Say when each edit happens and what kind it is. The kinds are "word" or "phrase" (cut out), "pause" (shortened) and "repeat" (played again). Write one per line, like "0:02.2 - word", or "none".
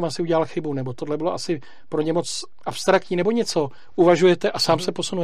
none